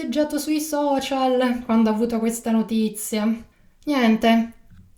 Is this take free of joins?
yes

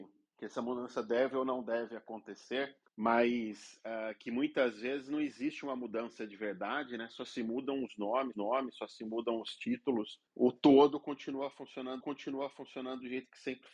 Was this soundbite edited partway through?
yes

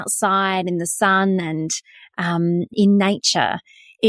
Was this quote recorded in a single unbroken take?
no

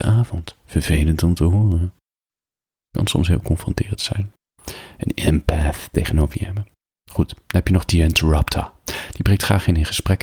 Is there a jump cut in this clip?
no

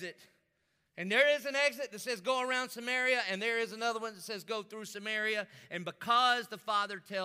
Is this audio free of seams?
yes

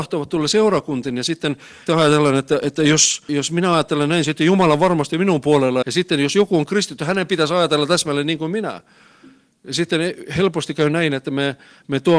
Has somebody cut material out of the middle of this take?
yes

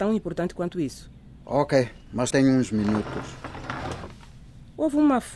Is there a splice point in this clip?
yes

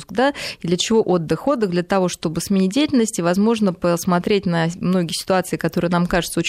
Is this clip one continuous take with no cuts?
yes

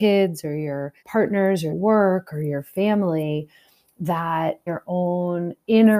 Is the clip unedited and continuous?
no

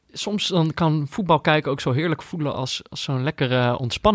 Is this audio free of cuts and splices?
yes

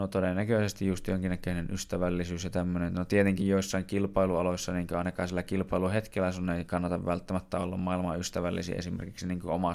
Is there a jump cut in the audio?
no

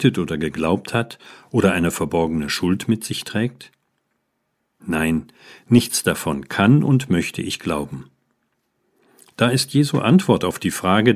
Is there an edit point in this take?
no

